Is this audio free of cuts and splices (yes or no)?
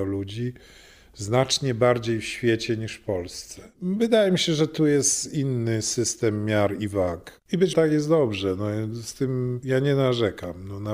no